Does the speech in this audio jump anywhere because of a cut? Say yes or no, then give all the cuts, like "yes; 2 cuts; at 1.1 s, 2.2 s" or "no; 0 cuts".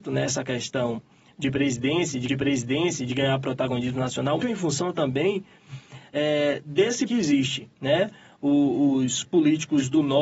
yes; 4 cuts; at 2.3 s, 4.4 s, 7.1 s, 7.7 s